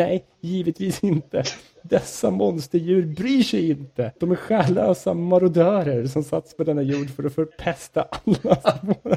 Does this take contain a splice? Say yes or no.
yes